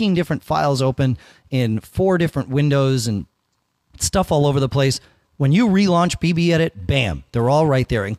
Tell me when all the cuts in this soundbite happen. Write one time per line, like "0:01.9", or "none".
none